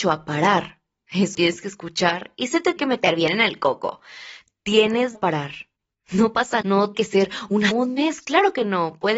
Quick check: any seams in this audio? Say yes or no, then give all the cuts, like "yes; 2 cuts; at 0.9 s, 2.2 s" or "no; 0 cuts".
yes; 6 cuts; at 1.3 s, 2.8 s, 5.1 s, 6.6 s, 6.9 s, 7.7 s